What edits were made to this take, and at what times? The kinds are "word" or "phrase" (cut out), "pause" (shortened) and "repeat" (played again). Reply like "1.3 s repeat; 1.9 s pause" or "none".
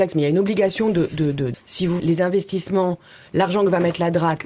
1.5 s word; 2.0 s word